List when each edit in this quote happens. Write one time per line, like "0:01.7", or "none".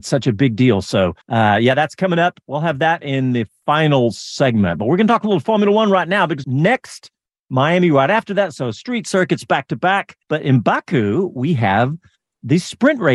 0:01.2
0:06.4
0:10.2